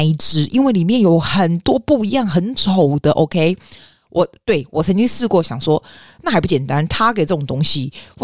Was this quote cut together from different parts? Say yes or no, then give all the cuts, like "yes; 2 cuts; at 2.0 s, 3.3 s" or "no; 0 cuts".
no; 0 cuts